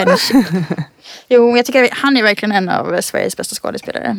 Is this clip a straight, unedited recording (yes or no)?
yes